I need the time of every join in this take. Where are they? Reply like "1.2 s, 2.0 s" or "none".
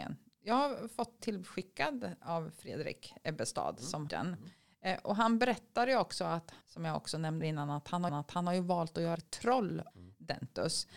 1.2 s, 4.1 s, 6.6 s, 7.4 s, 8.1 s, 9.2 s, 9.9 s